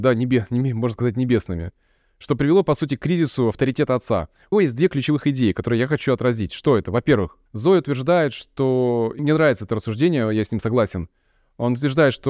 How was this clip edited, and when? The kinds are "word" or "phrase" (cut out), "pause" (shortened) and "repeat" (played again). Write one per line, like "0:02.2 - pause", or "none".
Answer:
0:04.5 - word
0:07.5 - pause
0:09.2 - word